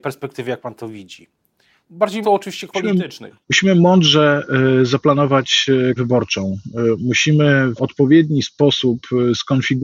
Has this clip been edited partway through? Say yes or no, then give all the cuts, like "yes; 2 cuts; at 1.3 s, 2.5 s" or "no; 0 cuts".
yes; 5 cuts; at 2.2 s, 2.7 s, 3.4 s, 6.0 s, 7.8 s